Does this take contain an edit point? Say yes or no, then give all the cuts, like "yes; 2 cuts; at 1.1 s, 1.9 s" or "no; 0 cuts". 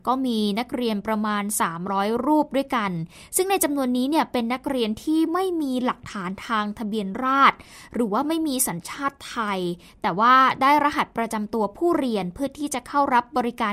no; 0 cuts